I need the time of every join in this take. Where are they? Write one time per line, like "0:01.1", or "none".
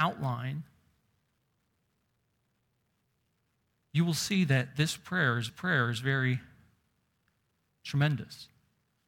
0:05.5